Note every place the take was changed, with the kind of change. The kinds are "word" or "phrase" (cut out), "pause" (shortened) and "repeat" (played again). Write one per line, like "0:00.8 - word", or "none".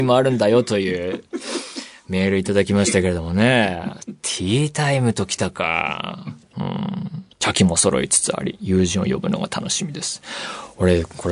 0:07.3 - pause